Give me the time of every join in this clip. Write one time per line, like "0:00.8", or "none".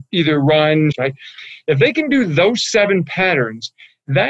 0:00.9